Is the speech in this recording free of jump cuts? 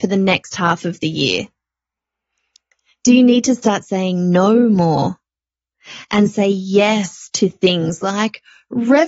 yes; 0 cuts

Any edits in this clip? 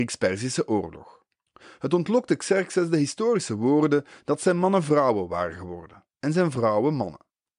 yes; 1 cut; at 1.5 s

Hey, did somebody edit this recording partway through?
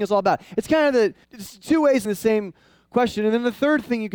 yes; 2 cuts; at 1.2 s, 2.0 s

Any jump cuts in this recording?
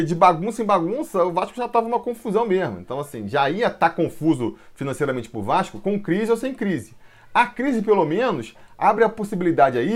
no; 0 cuts

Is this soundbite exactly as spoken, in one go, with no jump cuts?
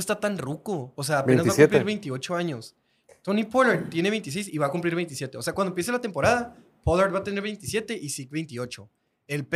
yes; 0 cuts

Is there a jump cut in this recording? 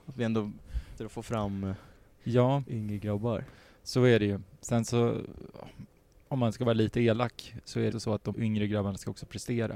yes; 3 cuts; at 1.0 s, 7.9 s, 8.3 s

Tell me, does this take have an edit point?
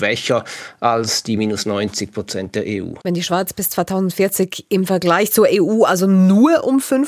yes; 1 cut; at 3.0 s

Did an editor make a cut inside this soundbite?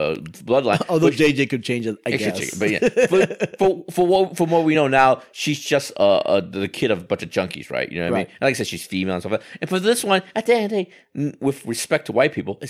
no; 0 cuts

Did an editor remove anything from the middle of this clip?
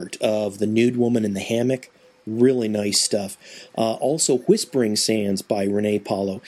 no; 0 cuts

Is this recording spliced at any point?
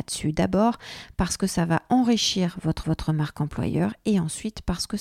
yes; 1 cut; at 2.8 s

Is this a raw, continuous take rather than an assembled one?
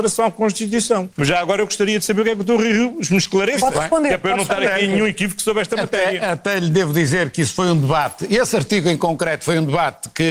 no; 1 cut; at 1.1 s

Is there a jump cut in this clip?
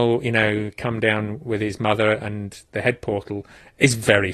no; 0 cuts

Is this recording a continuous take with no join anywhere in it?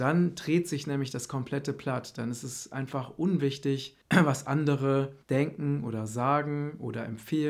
no; 2 cuts; at 4.0 s, 5.2 s

